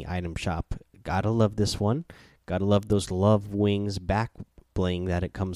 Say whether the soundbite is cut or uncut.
uncut